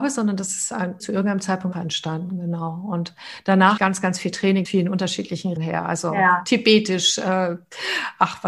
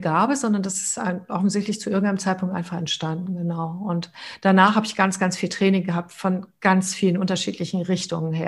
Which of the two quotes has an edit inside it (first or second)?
first